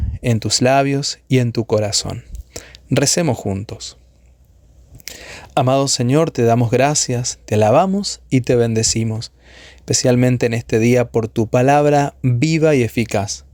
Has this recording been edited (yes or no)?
no